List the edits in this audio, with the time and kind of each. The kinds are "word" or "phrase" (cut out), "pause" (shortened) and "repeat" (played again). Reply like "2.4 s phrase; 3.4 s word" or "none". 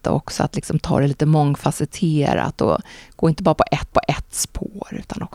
3.9 s repeat